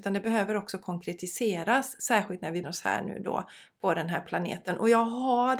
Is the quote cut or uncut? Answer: cut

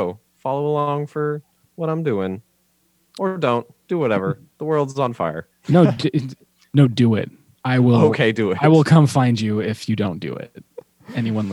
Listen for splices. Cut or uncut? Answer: uncut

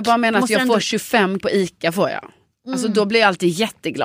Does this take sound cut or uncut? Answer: cut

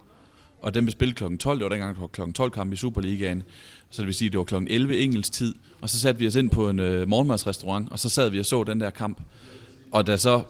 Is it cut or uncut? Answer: uncut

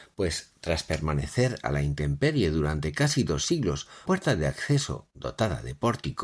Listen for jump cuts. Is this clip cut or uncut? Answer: cut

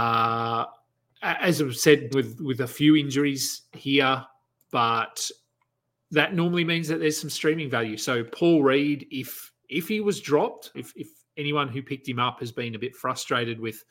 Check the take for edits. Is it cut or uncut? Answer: cut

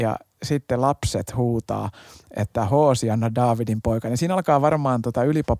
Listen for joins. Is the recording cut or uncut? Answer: uncut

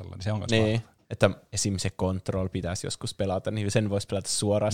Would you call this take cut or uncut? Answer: cut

